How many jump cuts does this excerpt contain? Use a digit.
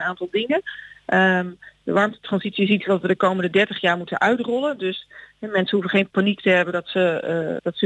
0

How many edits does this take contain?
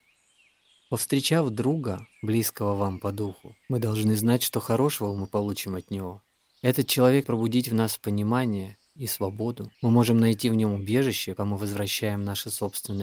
6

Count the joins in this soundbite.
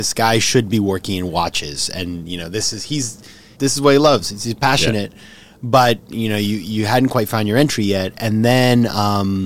1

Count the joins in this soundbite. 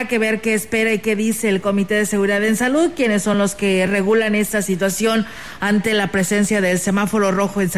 0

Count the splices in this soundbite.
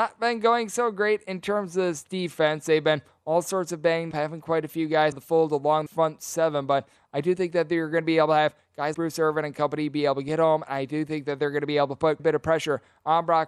5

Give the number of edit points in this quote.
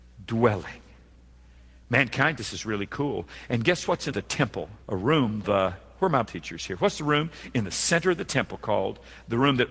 5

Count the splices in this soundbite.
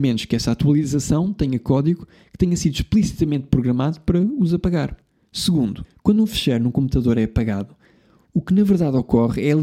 0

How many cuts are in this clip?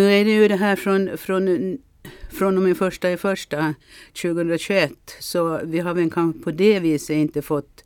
0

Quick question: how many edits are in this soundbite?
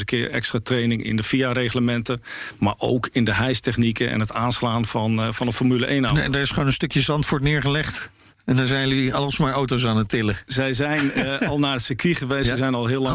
1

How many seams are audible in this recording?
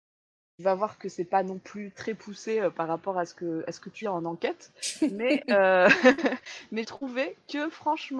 2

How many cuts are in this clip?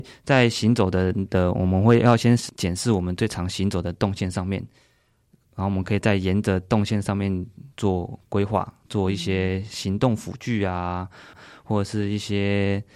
1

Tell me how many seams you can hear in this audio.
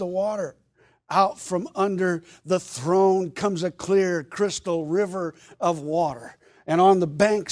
0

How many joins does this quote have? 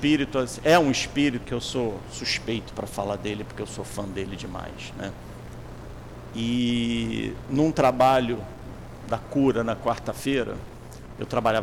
1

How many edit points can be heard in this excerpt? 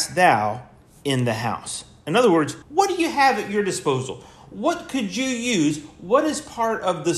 1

